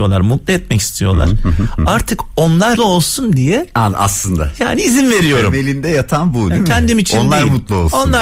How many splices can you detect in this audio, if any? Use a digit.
1